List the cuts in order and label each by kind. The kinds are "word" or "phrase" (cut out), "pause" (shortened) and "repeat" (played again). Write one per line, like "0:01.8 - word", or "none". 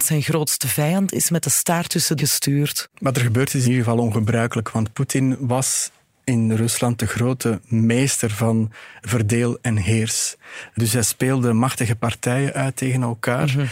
0:02.2 - phrase
0:03.6 - word
0:09.0 - word

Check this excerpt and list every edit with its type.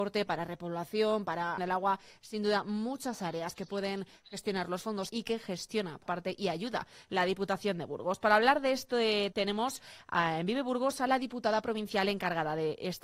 0:01.6 - phrase
0:05.1 - word
0:06.1 - word
0:09.3 - word

